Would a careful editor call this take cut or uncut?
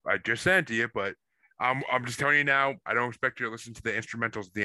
uncut